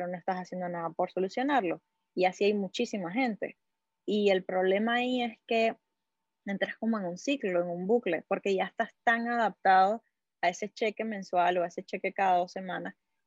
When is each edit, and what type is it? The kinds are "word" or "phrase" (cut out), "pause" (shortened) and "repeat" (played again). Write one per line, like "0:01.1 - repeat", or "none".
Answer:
none